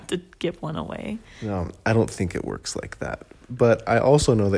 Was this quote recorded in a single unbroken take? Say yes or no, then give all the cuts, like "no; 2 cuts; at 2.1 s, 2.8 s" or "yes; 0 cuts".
yes; 0 cuts